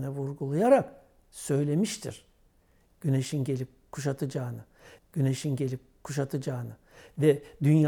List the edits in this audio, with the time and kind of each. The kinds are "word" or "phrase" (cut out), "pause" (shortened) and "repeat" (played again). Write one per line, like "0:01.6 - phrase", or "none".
0:05.0 - repeat